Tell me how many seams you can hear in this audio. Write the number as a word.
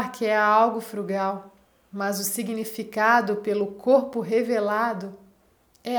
one